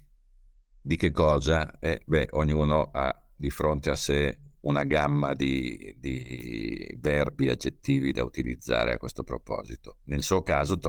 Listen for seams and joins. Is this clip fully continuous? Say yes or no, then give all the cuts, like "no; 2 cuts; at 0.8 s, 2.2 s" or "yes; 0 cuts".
yes; 0 cuts